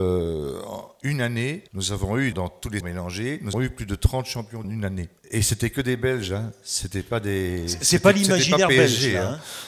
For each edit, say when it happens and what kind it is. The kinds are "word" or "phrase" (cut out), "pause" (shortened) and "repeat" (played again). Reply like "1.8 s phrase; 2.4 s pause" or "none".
1.7 s pause; 2.3 s word; 2.8 s word; 3.5 s word; 4.6 s phrase; 5.2 s pause